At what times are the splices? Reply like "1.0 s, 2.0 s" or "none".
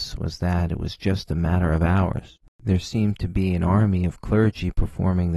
none